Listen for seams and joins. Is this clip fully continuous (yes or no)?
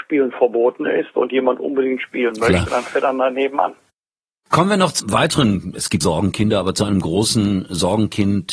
no